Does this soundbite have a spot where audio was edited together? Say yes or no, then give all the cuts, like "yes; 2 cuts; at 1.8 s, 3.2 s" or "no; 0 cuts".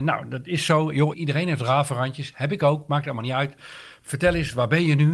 no; 0 cuts